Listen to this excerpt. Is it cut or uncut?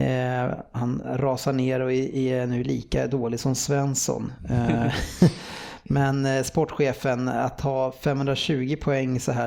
uncut